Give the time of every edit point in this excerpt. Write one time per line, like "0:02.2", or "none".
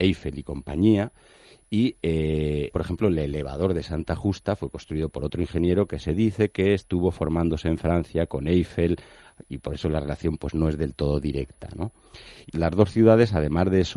0:02.7
0:12.5